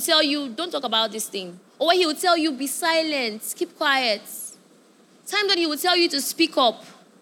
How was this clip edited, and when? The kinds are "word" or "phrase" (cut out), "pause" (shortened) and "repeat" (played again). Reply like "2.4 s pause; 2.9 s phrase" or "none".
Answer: 1.7 s pause

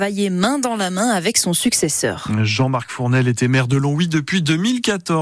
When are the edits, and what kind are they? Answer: none

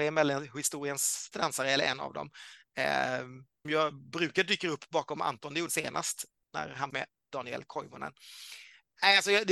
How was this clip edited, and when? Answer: 1.3 s word; 3.6 s word; 5.7 s phrase; 6.9 s phrase

